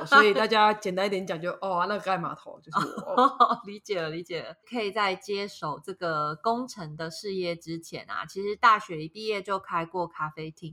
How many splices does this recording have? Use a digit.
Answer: 1